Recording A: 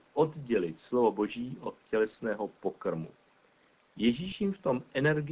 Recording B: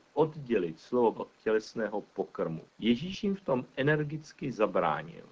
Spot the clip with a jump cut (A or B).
B